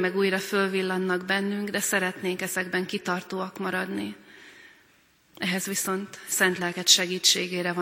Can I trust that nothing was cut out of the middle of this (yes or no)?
yes